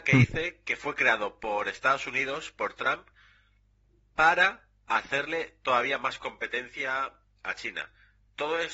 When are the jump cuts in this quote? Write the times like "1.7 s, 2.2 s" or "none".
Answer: none